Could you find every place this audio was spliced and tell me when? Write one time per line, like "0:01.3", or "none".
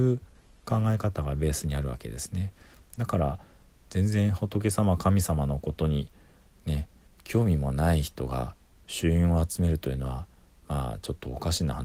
none